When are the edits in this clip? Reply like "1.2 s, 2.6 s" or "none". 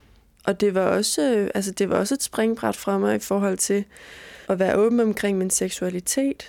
4.4 s